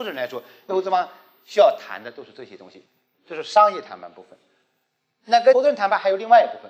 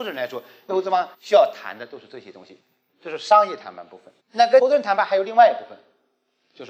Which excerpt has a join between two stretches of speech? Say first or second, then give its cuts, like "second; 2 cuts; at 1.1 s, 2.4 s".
second; 2 cuts; at 1.1 s, 4.2 s